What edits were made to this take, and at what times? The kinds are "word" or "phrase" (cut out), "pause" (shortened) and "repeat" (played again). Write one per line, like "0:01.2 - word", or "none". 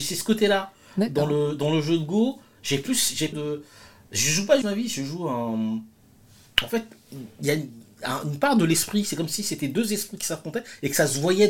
0:03.3 - phrase
0:04.6 - word
0:06.0 - pause